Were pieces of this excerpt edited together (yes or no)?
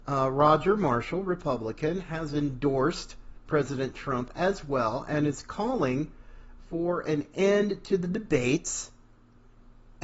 no